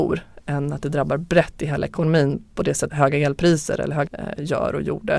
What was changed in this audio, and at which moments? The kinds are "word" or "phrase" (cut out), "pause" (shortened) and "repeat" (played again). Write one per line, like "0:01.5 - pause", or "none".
0:02.9 - word
0:04.1 - word